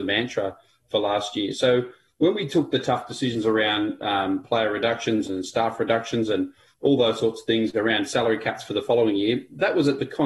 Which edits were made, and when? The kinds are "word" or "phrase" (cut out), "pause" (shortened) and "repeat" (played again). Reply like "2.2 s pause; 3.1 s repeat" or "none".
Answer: none

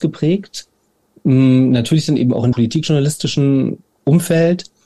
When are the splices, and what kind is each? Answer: 2.5 s word

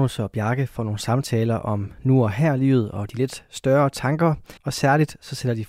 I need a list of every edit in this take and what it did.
4.6 s pause

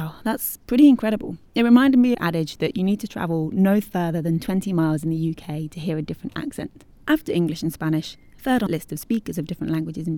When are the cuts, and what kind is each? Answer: 1.5 s pause; 2.1 s phrase; 6.9 s pause; 8.7 s word

